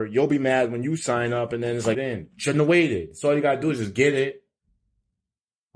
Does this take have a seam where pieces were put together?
yes; 1 cut; at 1.9 s

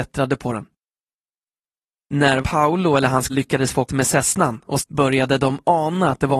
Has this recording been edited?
yes; 4 cuts; at 2.4 s, 3.3 s, 3.9 s, 4.8 s

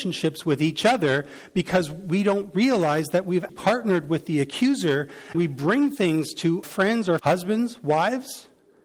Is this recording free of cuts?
no; 4 cuts; at 3.5 s, 5.3 s, 6.6 s, 7.2 s

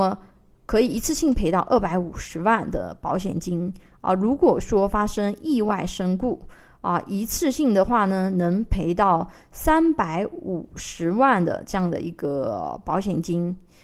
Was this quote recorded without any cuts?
yes; 0 cuts

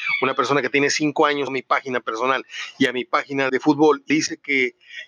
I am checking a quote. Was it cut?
yes; 3 cuts; at 1.5 s, 3.5 s, 4.1 s

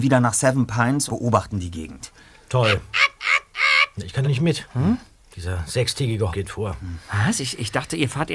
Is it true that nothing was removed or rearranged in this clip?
no; 3 cuts; at 1.1 s, 4.2 s, 6.3 s

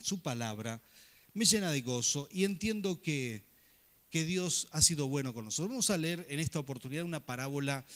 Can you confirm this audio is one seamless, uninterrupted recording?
yes; 0 cuts

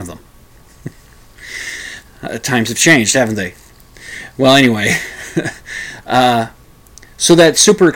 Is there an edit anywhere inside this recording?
no; 0 cuts

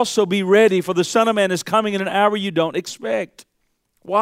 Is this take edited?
no; 0 cuts

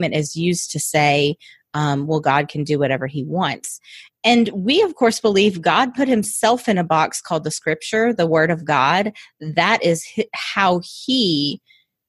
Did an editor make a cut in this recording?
no; 0 cuts

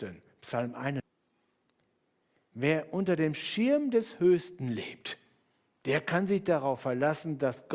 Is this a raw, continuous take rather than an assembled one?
yes; 0 cuts

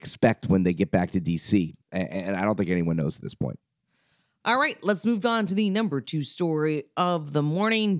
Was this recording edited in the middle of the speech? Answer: no; 0 cuts

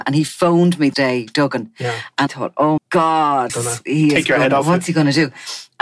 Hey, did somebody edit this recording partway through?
yes; 4 cuts; at 0.9 s, 2.3 s, 2.8 s, 3.5 s

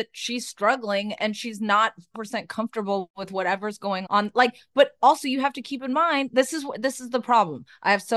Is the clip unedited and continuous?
no; 2 cuts; at 2.1 s, 4.1 s

